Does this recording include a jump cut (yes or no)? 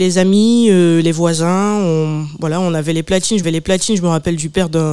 yes